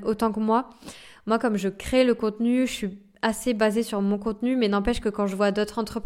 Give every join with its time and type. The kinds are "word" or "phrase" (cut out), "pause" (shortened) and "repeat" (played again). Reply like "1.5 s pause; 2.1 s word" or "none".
none